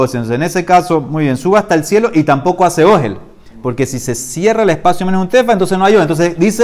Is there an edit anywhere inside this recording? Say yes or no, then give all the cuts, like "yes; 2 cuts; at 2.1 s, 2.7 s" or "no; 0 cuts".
no; 0 cuts